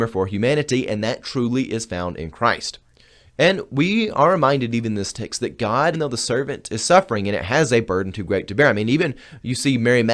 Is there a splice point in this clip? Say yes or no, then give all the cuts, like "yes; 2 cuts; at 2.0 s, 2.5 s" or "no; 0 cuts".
yes; 1 cut; at 5.9 s